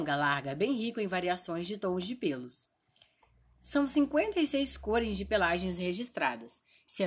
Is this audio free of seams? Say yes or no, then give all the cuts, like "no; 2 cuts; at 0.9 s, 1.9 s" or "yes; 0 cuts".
yes; 0 cuts